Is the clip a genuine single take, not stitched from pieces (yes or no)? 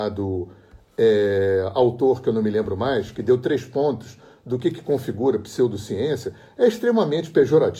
yes